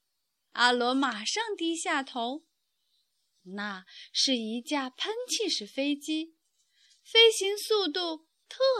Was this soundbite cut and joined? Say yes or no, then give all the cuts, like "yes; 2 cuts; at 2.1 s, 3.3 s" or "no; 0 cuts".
no; 0 cuts